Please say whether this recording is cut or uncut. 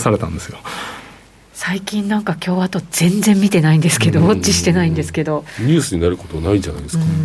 uncut